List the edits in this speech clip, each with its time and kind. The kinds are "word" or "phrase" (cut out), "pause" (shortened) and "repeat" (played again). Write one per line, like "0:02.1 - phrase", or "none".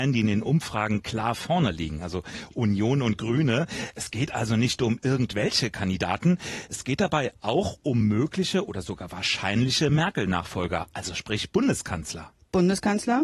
none

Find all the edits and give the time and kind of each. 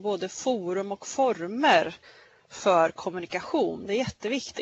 none

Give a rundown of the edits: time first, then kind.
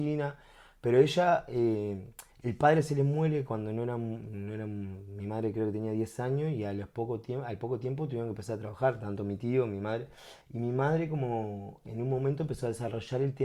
0:02.3 - pause
0:10.4 - pause

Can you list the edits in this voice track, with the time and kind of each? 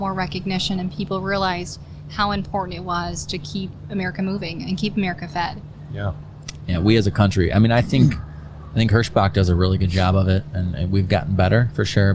none

